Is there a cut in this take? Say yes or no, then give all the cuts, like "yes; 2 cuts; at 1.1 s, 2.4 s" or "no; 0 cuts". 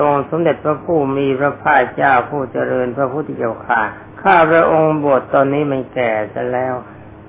yes; 1 cut; at 4.1 s